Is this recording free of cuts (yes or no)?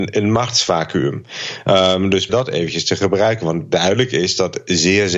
no